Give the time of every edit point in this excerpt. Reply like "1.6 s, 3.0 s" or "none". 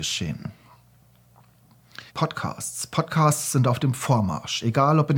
2.1 s